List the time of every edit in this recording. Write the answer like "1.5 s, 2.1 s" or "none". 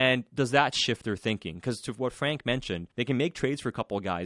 2.9 s